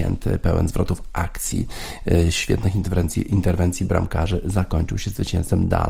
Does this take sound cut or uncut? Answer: uncut